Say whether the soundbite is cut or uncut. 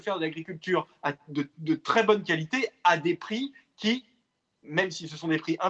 uncut